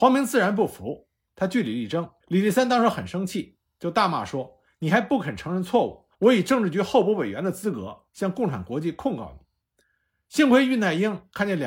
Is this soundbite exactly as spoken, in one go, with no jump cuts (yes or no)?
no